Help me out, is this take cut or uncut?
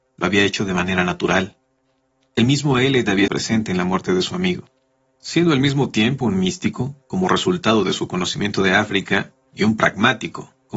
cut